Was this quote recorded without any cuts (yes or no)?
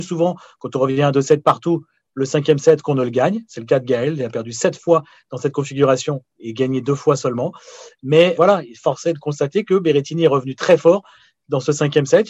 no